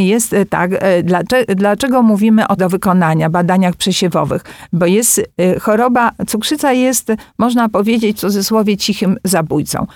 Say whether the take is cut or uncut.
cut